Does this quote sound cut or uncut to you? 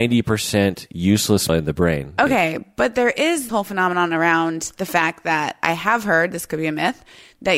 cut